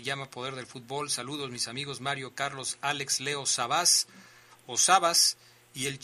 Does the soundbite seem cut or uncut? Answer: uncut